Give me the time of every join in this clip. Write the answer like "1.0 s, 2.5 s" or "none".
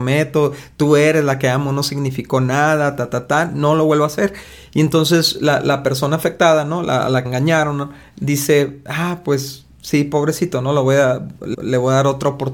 7.2 s, 11.5 s